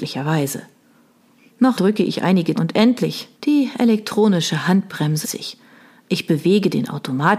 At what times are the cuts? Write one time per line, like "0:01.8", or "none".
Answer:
0:01.8
0:02.6
0:03.3
0:05.2